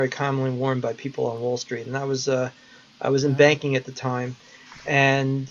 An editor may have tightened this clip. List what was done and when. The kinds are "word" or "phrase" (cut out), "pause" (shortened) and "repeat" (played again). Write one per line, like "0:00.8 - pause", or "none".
none

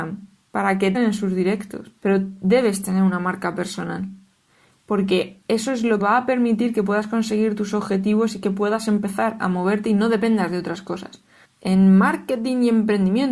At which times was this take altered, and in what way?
0:00.9 - word
0:02.0 - pause
0:05.4 - pause
0:06.0 - phrase
0:11.4 - pause

